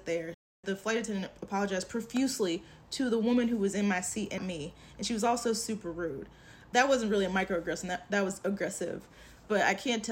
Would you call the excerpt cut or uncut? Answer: cut